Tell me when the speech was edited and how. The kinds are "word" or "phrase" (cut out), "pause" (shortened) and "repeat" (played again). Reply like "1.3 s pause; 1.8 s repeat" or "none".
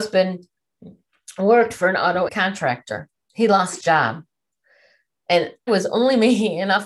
2.3 s word; 3.8 s word; 5.7 s word